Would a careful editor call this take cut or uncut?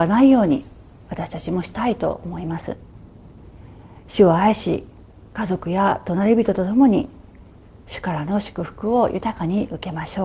uncut